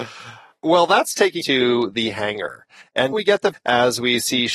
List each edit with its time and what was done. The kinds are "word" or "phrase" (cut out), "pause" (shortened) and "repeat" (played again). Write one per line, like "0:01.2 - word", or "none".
0:01.4 - word
0:03.1 - word
0:03.5 - word